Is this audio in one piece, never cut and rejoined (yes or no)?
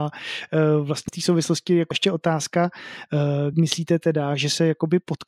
no